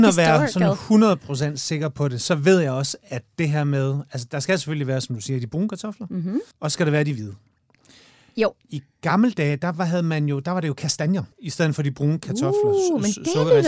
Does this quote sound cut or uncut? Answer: cut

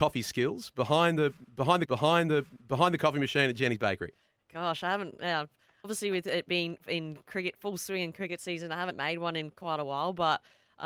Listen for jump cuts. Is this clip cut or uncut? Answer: cut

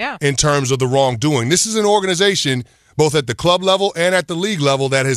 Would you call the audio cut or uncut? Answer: uncut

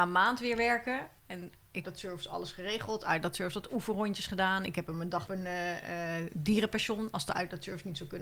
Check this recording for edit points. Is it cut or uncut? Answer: cut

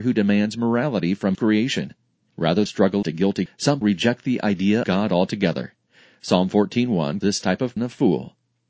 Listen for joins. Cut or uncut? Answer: cut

